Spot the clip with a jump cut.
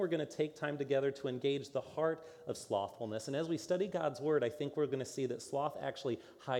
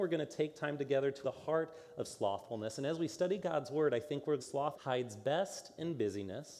second; 3 cuts; at 1.2 s, 4.4 s, 4.7 s

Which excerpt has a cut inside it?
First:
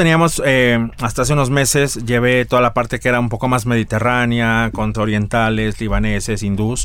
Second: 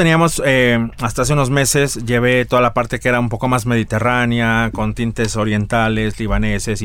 first; 1 cut; at 4.9 s

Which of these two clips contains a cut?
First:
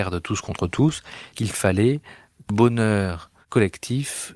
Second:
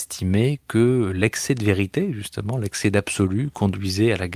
first; 2 cuts; at 1.3 s, 2.5 s

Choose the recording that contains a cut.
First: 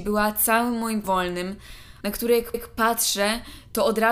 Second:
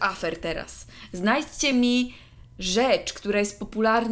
first; 3 cuts; at 1.0 s, 2.0 s, 2.5 s

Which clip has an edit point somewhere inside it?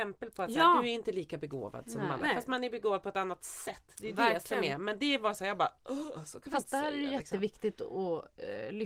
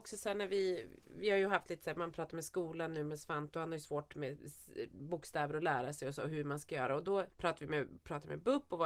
second; 1 cut; at 7.3 s

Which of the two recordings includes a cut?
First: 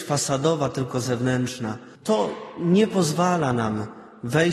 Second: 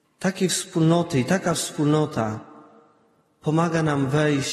first; 1 cut; at 2.0 s

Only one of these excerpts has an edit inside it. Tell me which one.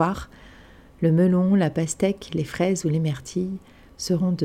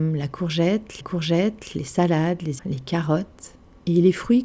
second; 2 cuts; at 1.0 s, 2.6 s

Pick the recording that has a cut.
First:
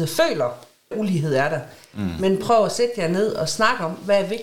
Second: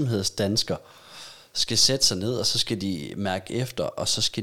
first; 1 cut; at 0.9 s

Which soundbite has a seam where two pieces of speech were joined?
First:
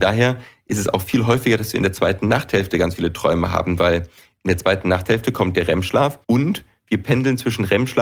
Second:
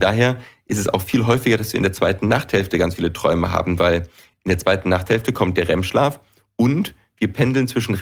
first; 1 cut; at 6.2 s

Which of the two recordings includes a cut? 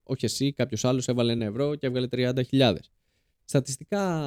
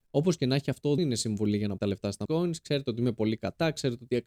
second; 3 cuts; at 1.0 s, 1.8 s, 2.3 s

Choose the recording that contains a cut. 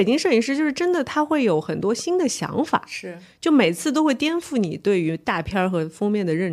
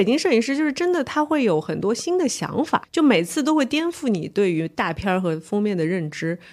second; 1 cut; at 2.8 s

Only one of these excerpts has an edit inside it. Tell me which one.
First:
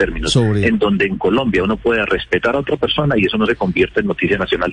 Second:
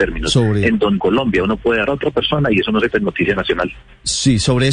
second; 3 cuts; at 1.0 s, 1.9 s, 2.9 s

